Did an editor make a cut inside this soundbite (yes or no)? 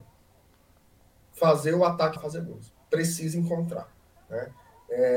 yes